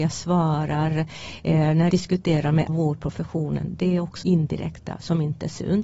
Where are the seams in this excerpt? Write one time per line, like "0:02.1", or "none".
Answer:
0:01.9
0:02.7
0:04.2